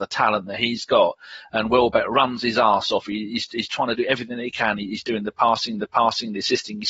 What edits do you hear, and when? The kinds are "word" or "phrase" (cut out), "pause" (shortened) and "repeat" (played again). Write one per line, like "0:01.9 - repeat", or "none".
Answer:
0:05.8 - repeat